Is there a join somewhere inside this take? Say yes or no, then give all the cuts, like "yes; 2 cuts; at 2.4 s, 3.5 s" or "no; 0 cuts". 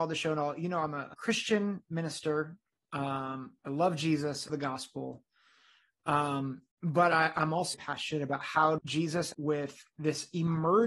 yes; 7 cuts; at 1.1 s, 3.6 s, 4.5 s, 6.7 s, 7.7 s, 8.8 s, 9.3 s